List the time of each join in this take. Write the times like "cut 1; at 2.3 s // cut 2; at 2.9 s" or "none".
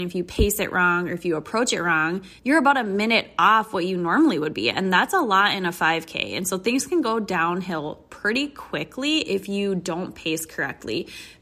cut 1; at 2.4 s